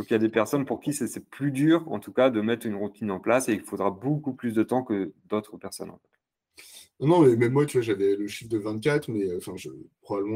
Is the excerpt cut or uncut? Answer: uncut